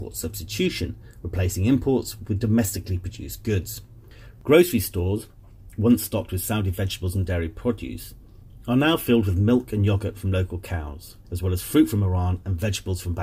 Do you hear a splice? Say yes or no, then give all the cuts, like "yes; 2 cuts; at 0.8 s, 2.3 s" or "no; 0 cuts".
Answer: yes; 1 cut; at 11.2 s